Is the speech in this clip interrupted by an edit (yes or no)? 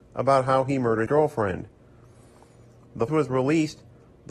yes